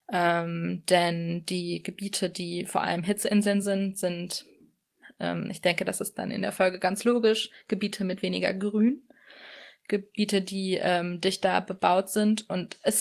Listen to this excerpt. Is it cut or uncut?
uncut